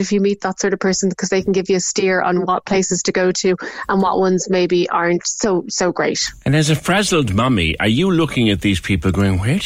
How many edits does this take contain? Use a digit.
0